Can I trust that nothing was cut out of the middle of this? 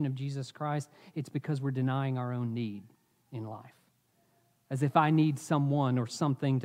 yes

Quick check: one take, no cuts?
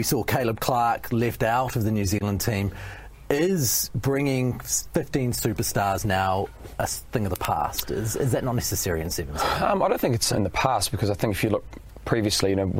no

